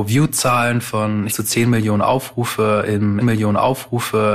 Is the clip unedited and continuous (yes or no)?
no